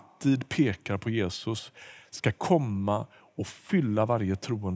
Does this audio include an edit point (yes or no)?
no